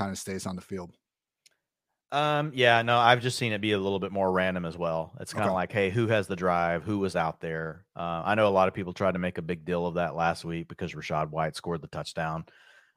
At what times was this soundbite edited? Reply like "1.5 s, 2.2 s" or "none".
none